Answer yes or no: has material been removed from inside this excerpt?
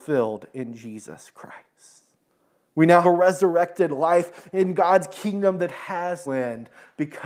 yes